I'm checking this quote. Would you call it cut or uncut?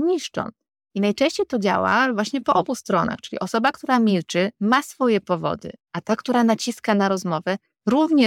uncut